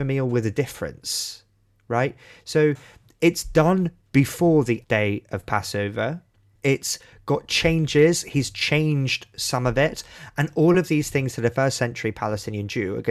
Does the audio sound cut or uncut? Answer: cut